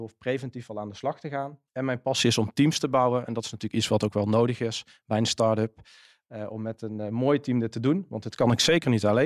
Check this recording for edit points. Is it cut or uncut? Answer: cut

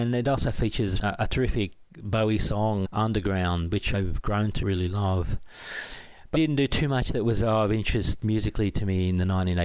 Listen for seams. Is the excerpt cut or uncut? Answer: cut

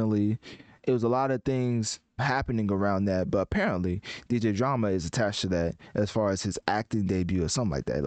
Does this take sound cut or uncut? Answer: cut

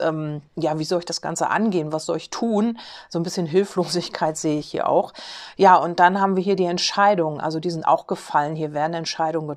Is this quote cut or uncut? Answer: uncut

